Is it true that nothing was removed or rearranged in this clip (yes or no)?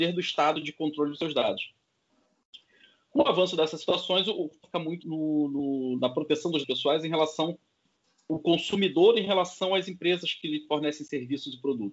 no